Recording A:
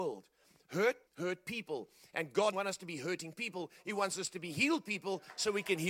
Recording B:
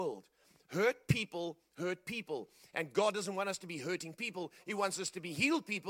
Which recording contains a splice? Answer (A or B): A